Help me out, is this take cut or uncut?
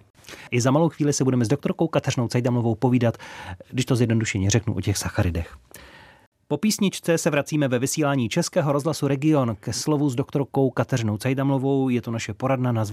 uncut